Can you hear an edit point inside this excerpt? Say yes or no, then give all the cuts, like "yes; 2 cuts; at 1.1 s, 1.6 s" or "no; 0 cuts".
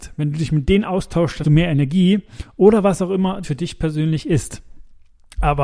yes; 2 cuts; at 1.4 s, 3.4 s